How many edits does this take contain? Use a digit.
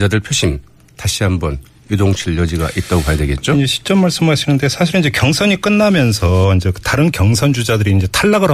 0